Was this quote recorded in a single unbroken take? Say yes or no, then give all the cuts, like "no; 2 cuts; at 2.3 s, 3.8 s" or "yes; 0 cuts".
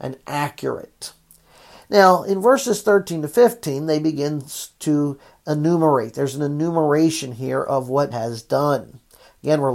no; 1 cut; at 8.1 s